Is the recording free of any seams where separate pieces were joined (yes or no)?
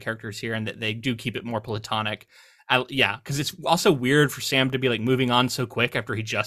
yes